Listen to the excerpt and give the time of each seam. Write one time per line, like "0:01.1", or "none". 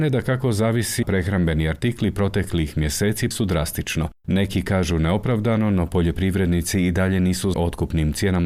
0:01.0
0:03.3
0:07.5